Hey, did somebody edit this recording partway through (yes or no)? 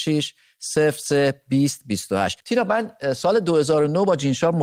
yes